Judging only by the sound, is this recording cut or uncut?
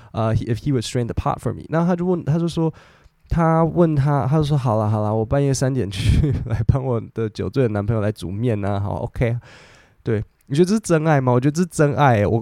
uncut